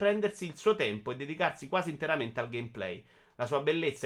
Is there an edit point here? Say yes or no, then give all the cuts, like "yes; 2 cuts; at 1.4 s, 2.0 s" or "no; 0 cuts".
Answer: no; 0 cuts